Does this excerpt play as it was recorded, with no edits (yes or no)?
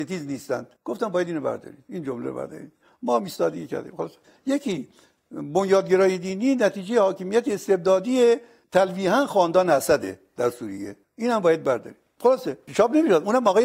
yes